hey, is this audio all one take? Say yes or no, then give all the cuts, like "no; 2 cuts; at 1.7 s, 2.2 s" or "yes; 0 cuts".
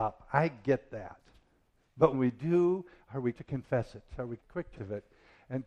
no; 4 cuts; at 2.1 s, 3.3 s, 4.4 s, 4.8 s